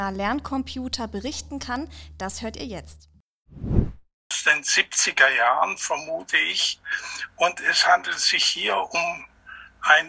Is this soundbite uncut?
yes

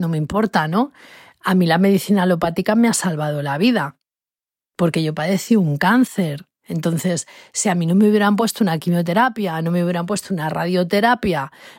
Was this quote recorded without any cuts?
yes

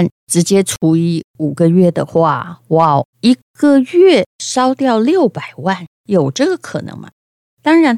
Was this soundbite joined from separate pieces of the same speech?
yes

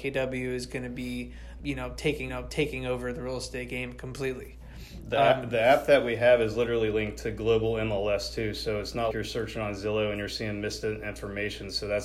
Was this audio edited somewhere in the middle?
yes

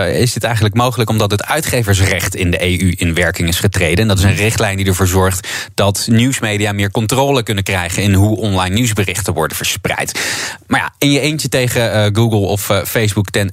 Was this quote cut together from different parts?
no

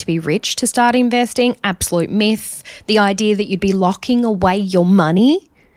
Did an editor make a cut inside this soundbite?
no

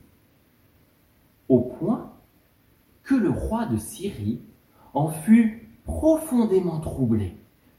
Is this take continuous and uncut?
yes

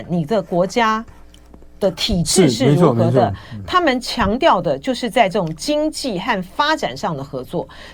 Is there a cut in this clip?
no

